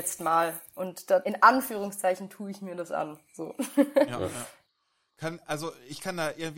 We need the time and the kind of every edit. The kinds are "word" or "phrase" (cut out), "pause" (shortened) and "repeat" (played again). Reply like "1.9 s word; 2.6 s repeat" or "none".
1.2 s word